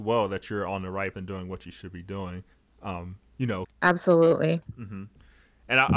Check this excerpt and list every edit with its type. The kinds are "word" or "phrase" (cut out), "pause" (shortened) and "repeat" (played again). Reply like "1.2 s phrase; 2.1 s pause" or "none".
1.1 s word; 2.5 s pause; 3.6 s phrase